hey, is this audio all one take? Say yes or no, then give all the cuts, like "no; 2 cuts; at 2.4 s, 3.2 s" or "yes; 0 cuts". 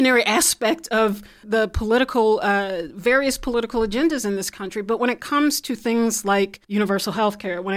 no; 2 cuts; at 1.4 s, 6.6 s